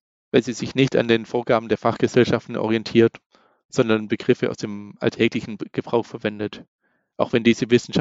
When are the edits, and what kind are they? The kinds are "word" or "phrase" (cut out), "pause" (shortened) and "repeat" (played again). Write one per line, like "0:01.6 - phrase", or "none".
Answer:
none